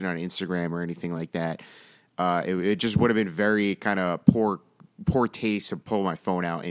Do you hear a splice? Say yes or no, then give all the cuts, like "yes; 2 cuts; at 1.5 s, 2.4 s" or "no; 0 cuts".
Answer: no; 0 cuts